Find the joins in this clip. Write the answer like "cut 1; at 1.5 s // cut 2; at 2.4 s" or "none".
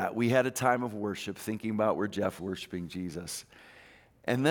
cut 1; at 2.4 s

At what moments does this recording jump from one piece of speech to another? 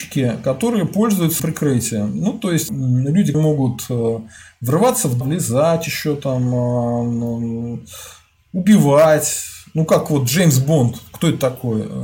cut 1; at 1.4 s // cut 2; at 2.7 s // cut 3; at 3.3 s // cut 4; at 5.2 s

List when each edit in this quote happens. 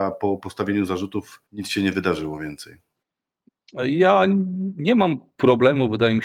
cut 1; at 1.5 s

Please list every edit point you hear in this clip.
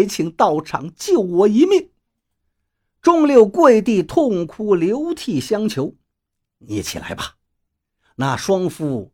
cut 1; at 6.1 s

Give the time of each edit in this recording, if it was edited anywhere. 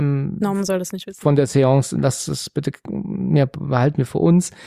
none

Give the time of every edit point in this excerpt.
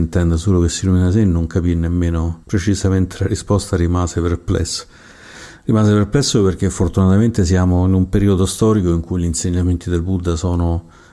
cut 1; at 2.4 s

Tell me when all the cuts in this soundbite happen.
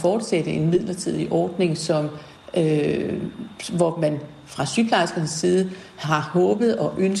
none

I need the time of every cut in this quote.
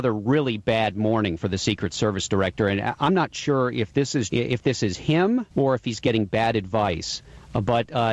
cut 1; at 4.3 s // cut 2; at 5.5 s

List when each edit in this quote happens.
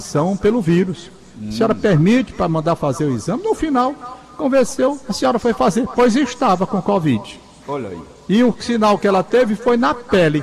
none

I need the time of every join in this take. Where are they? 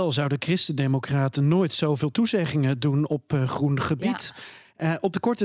none

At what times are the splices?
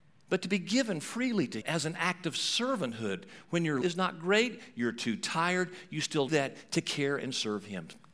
cut 1; at 1.6 s // cut 2; at 3.8 s // cut 3; at 6.3 s

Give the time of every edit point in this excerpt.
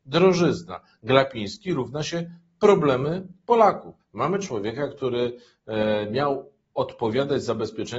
cut 1; at 4.0 s

